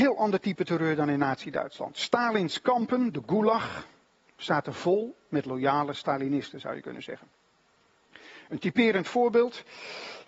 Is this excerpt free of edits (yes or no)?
yes